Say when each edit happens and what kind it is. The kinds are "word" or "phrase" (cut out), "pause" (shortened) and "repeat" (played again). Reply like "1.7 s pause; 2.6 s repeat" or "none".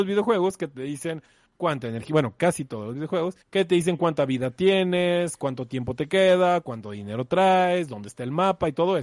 3.4 s pause